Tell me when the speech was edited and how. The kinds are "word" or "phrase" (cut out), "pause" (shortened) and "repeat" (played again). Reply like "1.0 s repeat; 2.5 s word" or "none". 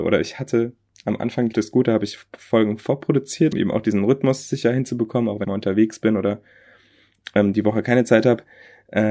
1.5 s word; 3.5 s word; 5.4 s word